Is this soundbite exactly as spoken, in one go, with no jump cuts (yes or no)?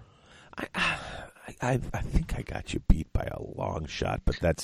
yes